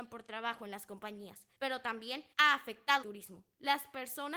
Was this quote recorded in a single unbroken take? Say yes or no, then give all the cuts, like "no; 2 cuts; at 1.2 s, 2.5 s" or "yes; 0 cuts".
no; 3 cuts; at 1.5 s, 2.3 s, 3.0 s